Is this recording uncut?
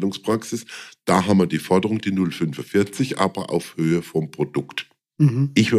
yes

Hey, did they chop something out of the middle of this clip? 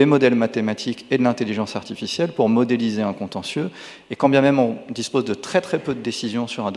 no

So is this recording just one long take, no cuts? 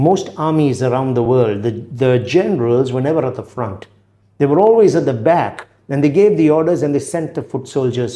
yes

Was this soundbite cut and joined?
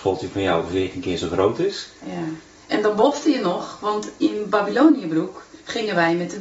no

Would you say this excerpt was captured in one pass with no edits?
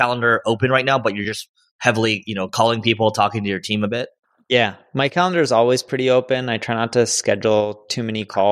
yes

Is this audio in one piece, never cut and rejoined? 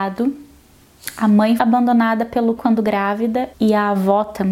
no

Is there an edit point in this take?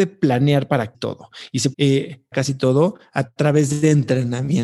yes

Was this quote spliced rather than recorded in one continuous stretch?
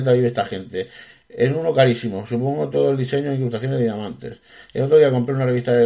no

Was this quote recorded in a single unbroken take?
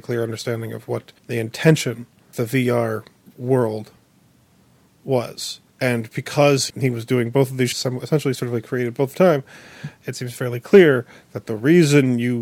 no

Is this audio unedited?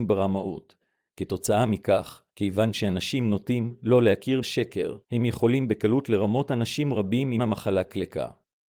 no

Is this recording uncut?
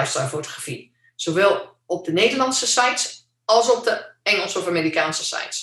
yes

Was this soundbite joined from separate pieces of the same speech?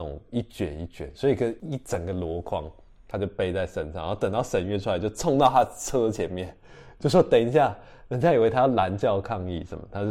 no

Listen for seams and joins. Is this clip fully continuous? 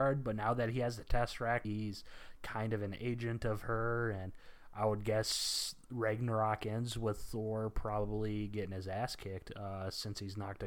no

